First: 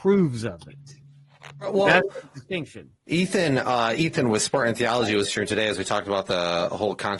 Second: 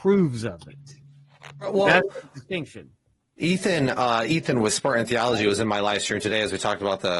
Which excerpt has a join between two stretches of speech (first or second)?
first